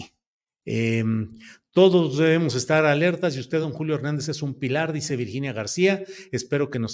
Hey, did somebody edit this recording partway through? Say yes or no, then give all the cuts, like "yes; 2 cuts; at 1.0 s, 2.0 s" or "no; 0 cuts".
no; 0 cuts